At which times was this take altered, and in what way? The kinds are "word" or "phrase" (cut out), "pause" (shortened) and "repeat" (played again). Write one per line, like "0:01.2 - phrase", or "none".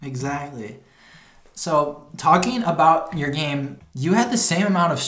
0:03.8 - word